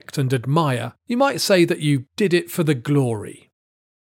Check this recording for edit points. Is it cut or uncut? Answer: cut